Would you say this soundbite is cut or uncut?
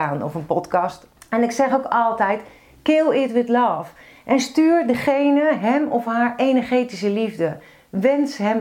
uncut